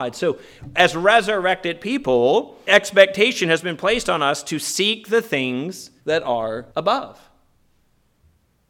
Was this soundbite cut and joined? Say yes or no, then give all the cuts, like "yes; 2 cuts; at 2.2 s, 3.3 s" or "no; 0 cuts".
yes; 3 cuts; at 2.7 s, 6.0 s, 6.7 s